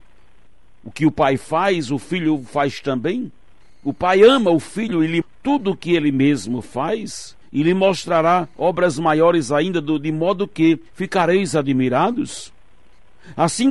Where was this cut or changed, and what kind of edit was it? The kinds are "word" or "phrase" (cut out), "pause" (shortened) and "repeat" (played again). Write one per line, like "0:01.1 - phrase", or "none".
0:05.2 - word
0:07.4 - pause
0:10.9 - pause